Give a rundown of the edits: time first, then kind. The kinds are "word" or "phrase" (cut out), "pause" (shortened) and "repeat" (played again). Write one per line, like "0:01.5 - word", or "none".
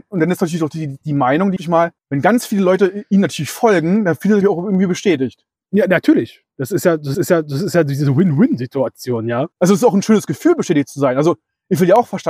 0:01.0 - pause
0:01.6 - phrase
0:02.0 - pause
0:04.4 - word
0:07.1 - repeat
0:09.5 - pause